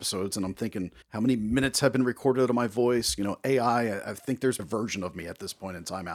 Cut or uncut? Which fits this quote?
cut